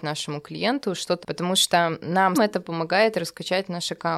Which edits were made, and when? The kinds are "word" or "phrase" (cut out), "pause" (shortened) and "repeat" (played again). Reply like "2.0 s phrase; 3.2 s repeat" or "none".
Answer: 1.2 s phrase; 2.3 s word